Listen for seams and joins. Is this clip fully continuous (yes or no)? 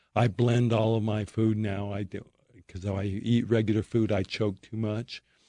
yes